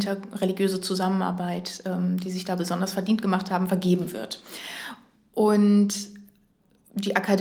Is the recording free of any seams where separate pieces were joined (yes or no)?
yes